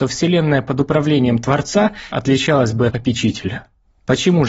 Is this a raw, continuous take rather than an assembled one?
no; 2 cuts; at 2.1 s, 2.9 s

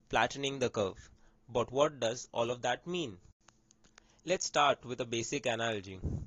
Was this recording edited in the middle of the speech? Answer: no; 0 cuts

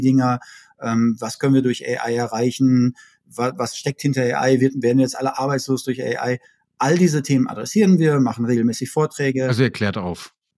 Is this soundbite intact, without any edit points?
yes; 0 cuts

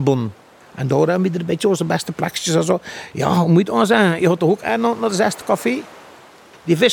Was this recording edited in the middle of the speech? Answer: no; 0 cuts

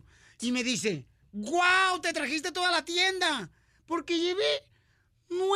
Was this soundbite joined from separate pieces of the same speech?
no; 0 cuts

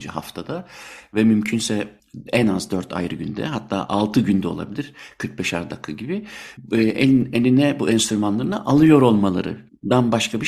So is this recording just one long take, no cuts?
yes; 0 cuts

